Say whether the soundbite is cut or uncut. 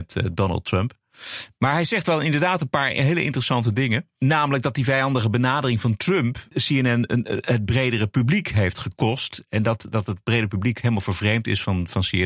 uncut